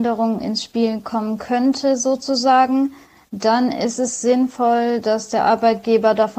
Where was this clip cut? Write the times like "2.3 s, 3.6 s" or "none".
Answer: none